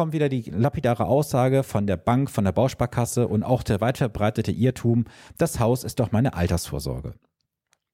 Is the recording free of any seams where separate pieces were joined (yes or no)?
yes